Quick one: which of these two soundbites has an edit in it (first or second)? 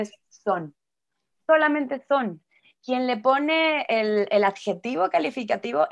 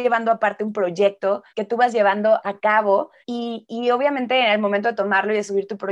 second